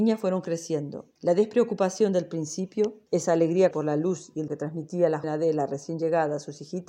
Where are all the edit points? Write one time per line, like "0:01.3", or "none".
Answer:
0:01.2
0:03.1
0:03.7
0:04.5
0:05.2